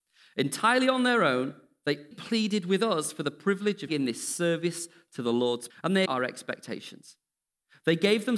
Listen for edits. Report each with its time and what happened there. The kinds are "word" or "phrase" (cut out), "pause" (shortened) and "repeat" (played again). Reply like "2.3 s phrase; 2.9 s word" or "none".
2.1 s word; 3.9 s word; 5.7 s word; 6.1 s word